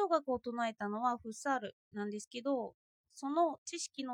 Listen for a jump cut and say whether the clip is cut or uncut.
uncut